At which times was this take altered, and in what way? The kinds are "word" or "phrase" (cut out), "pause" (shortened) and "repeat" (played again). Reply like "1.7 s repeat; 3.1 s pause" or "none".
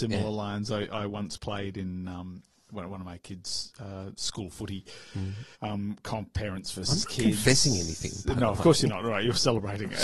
5.5 s pause